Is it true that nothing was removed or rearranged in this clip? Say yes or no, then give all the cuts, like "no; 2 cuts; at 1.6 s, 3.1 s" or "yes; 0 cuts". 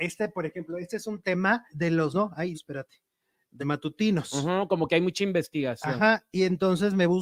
no; 4 cuts; at 1.7 s, 2.1 s, 2.5 s, 3.6 s